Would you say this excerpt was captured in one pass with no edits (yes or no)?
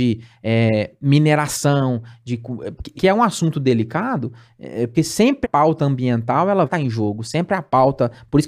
no